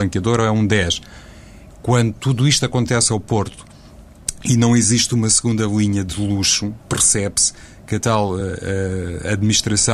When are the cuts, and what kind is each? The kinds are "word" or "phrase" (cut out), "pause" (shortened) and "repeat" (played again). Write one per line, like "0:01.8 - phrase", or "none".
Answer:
none